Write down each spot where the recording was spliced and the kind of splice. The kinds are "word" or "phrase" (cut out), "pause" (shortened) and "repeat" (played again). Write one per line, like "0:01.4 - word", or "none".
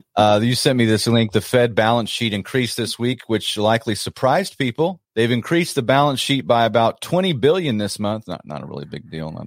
0:05.0 - pause